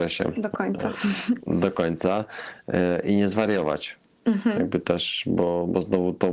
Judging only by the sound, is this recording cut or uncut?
uncut